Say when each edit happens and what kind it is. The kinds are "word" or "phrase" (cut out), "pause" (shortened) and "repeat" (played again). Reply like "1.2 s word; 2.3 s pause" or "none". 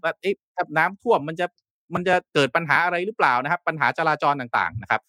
2.3 s pause